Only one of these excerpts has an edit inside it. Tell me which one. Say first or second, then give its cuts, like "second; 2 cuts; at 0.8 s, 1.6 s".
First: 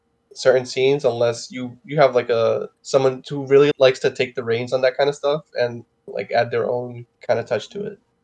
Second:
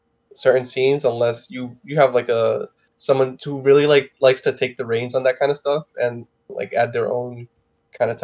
first; 3 cuts; at 2.7 s, 3.7 s, 7.1 s